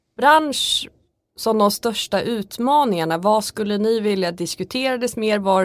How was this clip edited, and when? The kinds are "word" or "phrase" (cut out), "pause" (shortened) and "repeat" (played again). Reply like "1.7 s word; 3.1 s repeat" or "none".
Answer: none